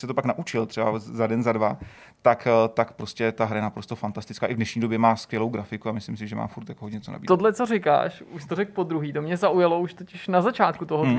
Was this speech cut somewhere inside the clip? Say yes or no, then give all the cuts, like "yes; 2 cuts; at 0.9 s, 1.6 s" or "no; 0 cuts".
no; 0 cuts